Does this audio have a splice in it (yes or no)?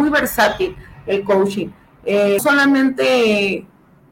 yes